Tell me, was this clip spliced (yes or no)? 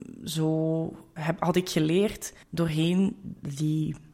yes